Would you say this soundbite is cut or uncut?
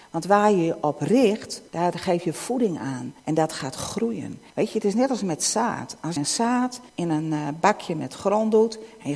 cut